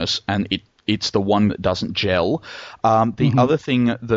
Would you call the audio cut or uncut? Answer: cut